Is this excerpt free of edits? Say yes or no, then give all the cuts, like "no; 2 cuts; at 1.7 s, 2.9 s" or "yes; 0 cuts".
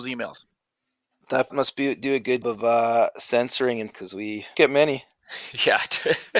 no; 4 cuts; at 1.5 s, 2.4 s, 3.9 s, 4.5 s